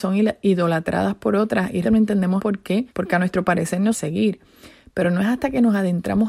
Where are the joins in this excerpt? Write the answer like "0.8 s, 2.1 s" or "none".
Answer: 1.8 s, 2.4 s, 2.9 s, 3.9 s